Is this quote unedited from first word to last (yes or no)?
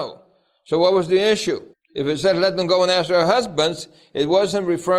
no